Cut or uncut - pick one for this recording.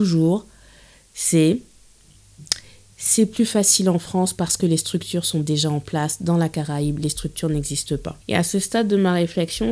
cut